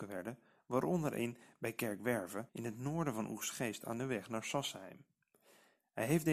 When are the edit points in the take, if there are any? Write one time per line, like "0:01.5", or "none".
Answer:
0:02.5